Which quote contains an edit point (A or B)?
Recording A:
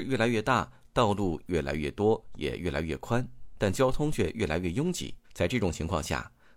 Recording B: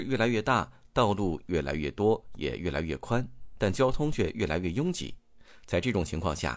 A